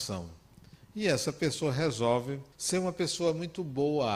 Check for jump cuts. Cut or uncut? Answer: cut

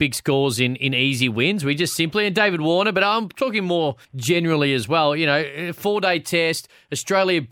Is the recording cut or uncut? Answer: cut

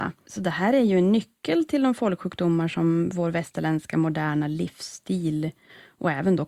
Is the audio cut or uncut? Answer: uncut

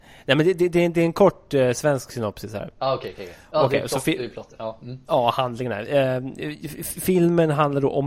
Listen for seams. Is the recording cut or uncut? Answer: uncut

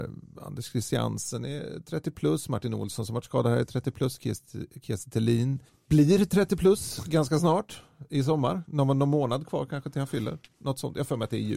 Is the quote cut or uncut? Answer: cut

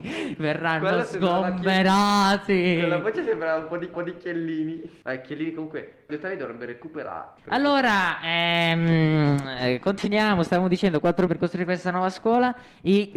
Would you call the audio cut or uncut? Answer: cut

